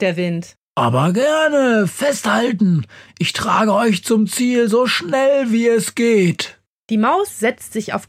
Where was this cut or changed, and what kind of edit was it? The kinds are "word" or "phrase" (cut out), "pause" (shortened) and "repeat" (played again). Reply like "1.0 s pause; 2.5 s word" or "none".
none